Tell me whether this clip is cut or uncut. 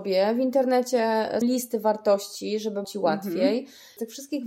cut